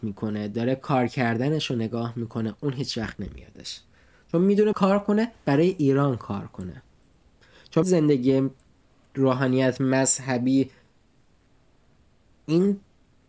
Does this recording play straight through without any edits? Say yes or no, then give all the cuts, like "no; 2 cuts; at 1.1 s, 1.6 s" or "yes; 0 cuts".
no; 2 cuts; at 4.7 s, 7.8 s